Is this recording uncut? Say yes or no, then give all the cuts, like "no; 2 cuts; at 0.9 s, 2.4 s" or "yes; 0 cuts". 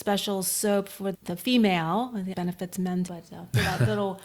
no; 3 cuts; at 1.1 s, 2.3 s, 3.1 s